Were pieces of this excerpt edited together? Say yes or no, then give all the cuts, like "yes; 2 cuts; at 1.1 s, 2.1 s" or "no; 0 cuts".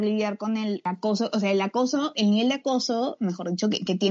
no; 0 cuts